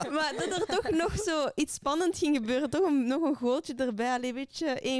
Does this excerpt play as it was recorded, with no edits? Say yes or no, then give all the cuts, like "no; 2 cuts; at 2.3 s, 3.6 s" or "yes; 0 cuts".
yes; 0 cuts